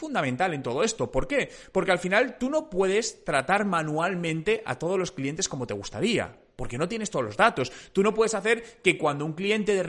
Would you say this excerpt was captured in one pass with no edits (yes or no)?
yes